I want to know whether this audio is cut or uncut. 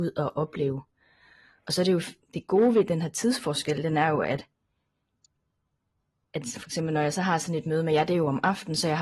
uncut